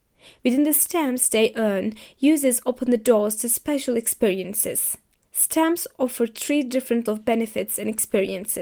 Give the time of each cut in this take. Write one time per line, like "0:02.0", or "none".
0:07.1

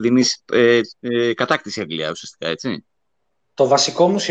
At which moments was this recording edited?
0:01.0

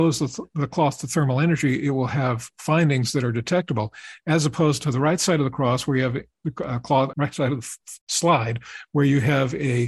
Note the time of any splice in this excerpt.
0:07.1
0:08.0

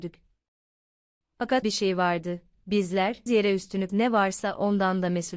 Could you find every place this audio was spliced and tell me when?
0:01.6
0:03.3
0:03.9

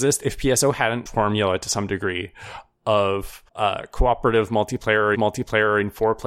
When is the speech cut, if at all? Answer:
0:01.1
0:03.5
0:05.1

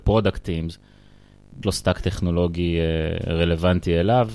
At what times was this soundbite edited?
0:01.6

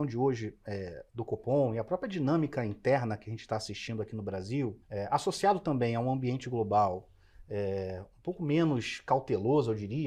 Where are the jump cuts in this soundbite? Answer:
0:01.1
0:04.8

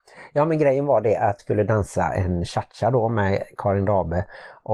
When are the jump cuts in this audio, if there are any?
0:01.4

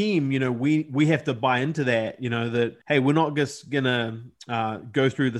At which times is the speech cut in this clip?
0:02.8

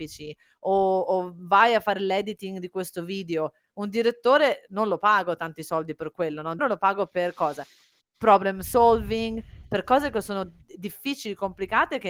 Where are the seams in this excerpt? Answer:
0:06.6

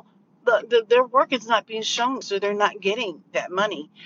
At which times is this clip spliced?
0:02.2

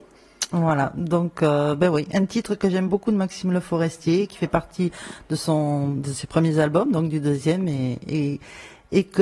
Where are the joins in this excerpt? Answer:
none

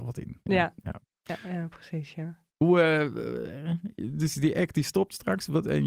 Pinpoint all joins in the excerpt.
0:02.5

